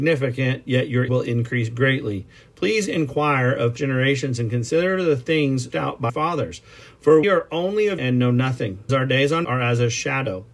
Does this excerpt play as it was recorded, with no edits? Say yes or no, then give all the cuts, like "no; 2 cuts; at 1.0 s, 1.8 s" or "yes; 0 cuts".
no; 8 cuts; at 1.1 s, 3.8 s, 5.7 s, 6.1 s, 7.2 s, 8.0 s, 8.9 s, 9.4 s